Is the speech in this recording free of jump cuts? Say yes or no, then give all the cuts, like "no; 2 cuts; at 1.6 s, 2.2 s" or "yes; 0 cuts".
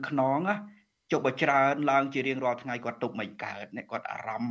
yes; 0 cuts